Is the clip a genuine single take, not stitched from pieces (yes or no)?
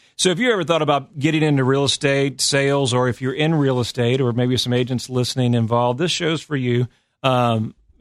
yes